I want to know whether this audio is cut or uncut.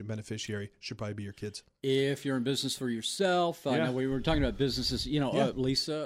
uncut